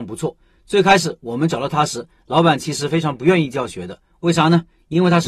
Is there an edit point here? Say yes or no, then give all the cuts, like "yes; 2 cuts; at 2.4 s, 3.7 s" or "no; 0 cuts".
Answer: no; 0 cuts